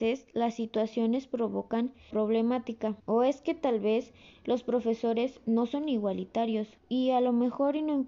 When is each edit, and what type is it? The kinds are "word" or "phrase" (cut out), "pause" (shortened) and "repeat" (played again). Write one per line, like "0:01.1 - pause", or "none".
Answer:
0:02.1 - word
0:03.0 - pause
0:06.8 - pause